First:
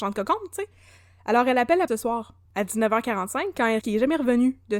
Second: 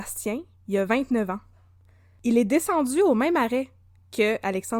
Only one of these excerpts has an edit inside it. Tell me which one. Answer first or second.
first